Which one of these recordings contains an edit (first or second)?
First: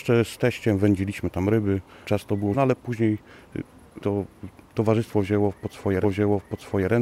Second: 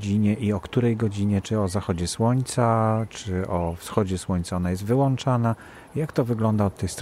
first